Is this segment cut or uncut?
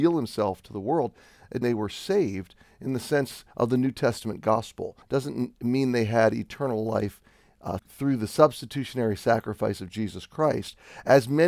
cut